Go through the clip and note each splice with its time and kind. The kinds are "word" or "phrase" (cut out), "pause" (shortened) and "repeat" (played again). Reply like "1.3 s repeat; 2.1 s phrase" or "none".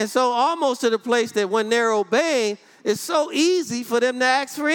none